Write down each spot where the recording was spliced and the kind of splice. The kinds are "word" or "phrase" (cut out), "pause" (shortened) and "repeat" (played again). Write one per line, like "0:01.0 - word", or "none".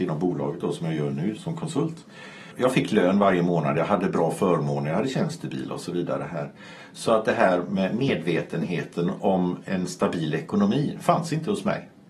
0:01.4 - word